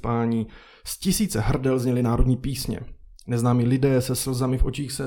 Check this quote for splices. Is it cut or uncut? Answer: uncut